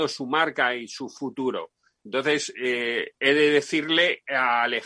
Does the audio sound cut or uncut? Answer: uncut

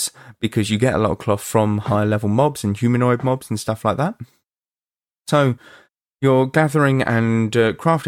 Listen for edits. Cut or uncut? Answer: uncut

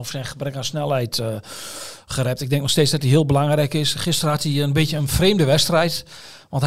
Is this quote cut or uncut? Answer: uncut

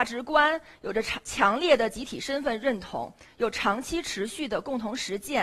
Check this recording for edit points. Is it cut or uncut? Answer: uncut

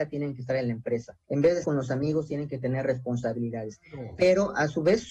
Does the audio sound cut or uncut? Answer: cut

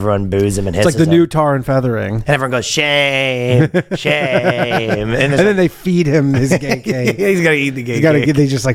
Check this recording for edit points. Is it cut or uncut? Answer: uncut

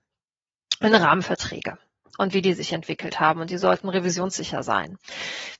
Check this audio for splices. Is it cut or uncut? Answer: uncut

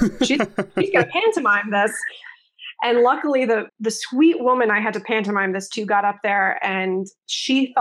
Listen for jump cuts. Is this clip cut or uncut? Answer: cut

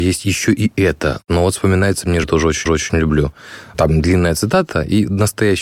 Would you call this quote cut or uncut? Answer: cut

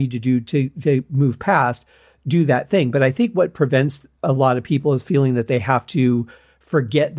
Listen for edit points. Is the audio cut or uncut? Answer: uncut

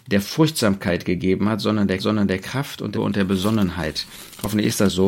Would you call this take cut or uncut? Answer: cut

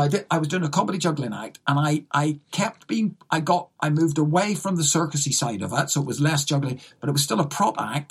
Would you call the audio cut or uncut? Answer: uncut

